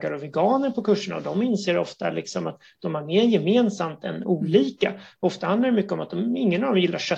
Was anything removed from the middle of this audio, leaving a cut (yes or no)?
no